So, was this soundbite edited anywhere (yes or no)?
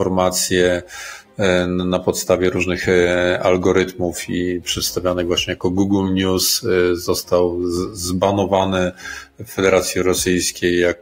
no